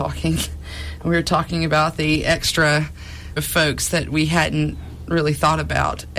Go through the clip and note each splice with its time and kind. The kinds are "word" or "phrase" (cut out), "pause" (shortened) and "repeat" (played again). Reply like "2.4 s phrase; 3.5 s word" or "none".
3.4 s word